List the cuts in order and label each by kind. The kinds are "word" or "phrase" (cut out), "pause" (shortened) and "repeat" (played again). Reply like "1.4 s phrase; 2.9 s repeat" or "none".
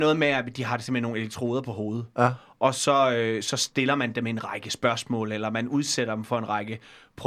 none